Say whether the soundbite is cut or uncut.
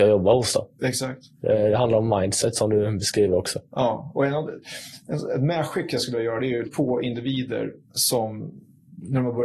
cut